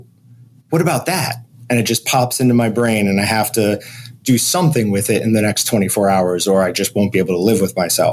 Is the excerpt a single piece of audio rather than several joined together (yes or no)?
yes